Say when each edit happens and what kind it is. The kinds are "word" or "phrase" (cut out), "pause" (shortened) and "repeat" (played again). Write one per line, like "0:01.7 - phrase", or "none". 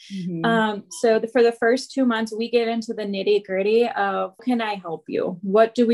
0:04.4 - word